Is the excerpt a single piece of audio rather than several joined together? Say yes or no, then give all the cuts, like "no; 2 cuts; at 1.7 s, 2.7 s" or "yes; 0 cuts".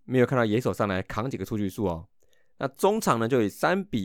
yes; 0 cuts